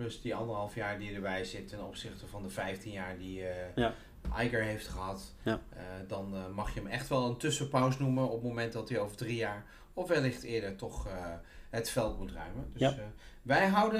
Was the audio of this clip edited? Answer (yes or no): no